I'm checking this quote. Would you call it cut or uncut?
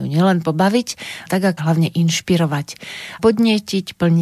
cut